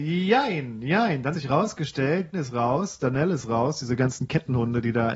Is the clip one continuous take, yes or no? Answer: no